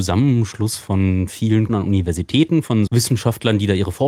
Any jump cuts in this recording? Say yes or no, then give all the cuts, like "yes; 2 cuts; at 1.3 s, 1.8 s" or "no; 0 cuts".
yes; 2 cuts; at 1.7 s, 2.9 s